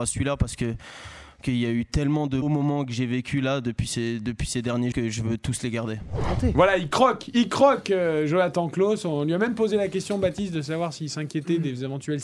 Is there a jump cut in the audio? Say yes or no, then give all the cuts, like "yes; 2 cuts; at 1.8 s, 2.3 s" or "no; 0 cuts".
yes; 3 cuts; at 1.4 s, 2.4 s, 4.9 s